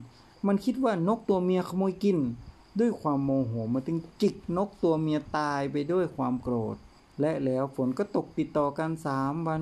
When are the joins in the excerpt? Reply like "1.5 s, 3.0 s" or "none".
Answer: 7.0 s